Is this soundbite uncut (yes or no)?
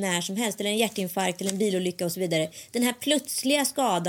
yes